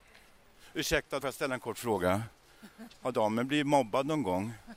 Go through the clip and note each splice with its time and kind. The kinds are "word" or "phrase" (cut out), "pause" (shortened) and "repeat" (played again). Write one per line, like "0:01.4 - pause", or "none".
0:01.2 - word